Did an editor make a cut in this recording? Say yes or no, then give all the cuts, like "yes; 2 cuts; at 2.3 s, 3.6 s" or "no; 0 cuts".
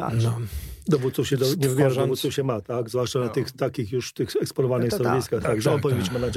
no; 0 cuts